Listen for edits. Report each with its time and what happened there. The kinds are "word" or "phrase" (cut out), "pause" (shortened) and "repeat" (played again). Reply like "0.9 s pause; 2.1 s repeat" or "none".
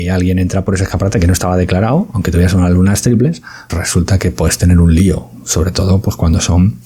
3.7 s word